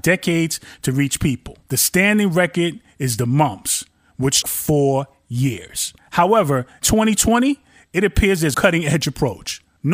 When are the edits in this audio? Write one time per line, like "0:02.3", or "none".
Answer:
0:04.4
0:06.8
0:08.5